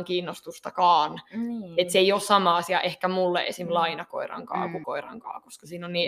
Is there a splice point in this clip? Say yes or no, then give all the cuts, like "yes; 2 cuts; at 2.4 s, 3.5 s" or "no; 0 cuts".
yes; 1 cut; at 4.8 s